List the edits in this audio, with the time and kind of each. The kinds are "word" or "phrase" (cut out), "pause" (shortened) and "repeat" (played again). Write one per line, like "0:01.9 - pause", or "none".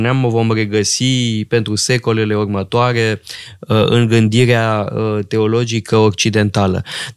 none